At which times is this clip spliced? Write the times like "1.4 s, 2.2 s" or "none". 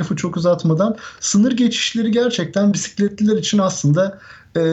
none